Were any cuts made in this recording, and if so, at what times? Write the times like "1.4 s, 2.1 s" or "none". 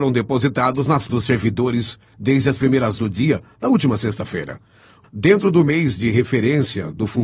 1.1 s, 3.0 s, 5.0 s